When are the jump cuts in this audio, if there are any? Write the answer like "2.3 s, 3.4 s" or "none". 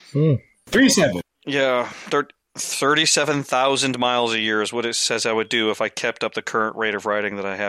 2.4 s